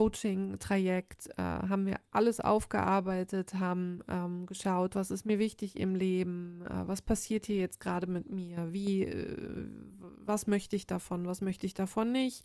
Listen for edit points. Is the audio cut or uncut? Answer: uncut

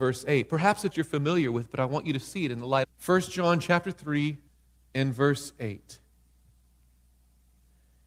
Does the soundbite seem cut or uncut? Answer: cut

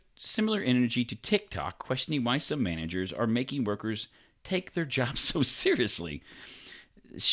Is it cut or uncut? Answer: uncut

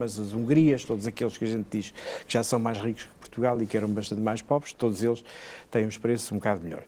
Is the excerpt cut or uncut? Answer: uncut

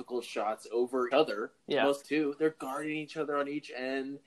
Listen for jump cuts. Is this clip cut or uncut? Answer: cut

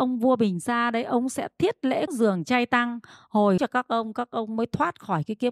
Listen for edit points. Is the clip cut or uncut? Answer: cut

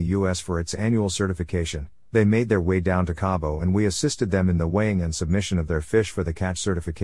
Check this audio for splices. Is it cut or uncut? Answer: uncut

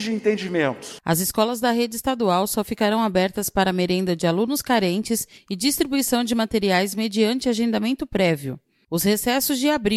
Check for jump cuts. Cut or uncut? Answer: uncut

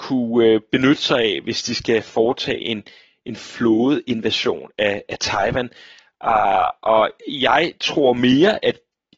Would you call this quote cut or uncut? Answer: uncut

